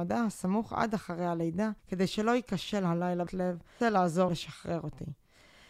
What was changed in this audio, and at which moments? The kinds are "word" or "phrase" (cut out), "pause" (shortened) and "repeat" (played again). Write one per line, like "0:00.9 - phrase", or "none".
0:01.8 - pause
0:03.3 - word
0:03.8 - word
0:04.3 - phrase